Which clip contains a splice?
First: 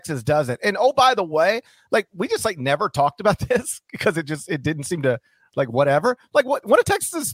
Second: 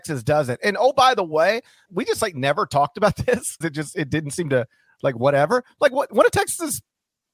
second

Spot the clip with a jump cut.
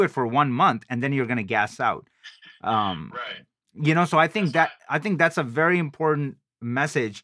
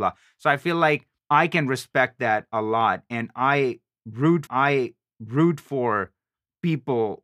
second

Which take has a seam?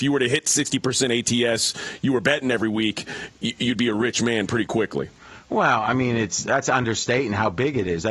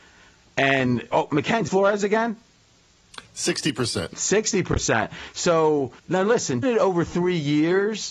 second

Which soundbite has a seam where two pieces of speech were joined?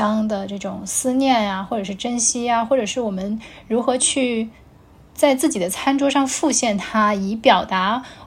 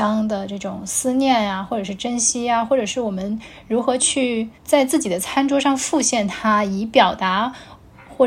second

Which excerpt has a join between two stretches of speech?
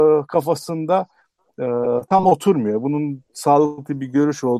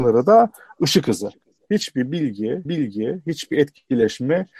second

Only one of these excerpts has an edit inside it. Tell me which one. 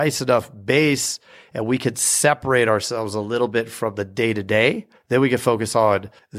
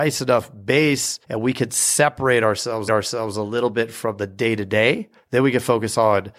second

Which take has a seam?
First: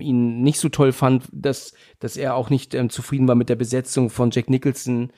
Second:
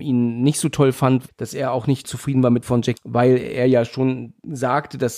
second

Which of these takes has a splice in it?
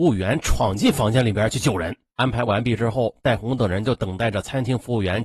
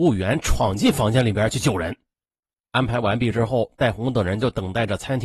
first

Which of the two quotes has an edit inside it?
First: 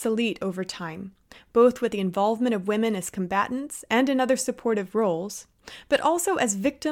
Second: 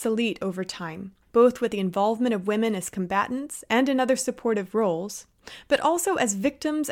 second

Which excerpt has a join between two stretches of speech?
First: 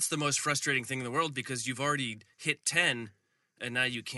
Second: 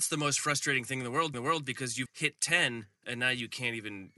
second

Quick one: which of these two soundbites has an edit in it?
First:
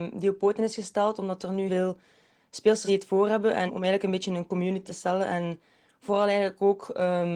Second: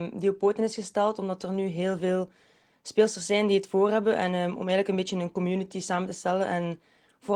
first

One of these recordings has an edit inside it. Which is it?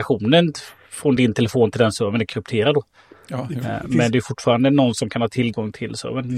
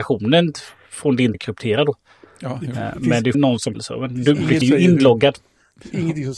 second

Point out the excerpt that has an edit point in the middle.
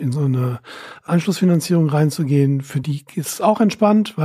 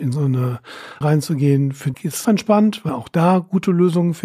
second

